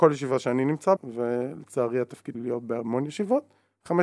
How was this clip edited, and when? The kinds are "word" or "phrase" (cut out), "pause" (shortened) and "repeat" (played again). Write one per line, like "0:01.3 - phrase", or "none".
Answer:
0:01.0 - word
0:02.3 - word